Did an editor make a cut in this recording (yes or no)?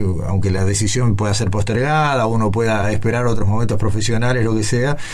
no